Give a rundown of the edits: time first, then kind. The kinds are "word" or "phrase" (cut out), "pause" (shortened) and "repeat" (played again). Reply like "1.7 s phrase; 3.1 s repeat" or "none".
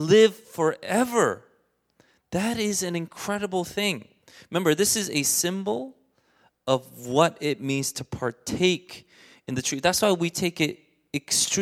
none